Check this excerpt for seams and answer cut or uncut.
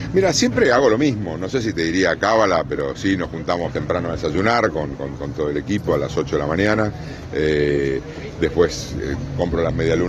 uncut